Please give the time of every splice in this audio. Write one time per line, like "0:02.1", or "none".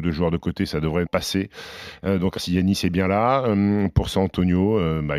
0:01.1
0:02.4